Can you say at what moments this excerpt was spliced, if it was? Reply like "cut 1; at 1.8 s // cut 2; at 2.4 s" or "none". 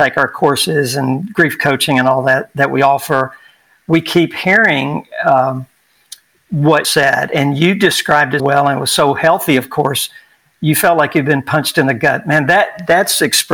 cut 1; at 6.8 s // cut 2; at 8.4 s